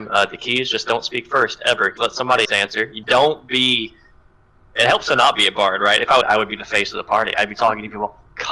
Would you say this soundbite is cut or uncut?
cut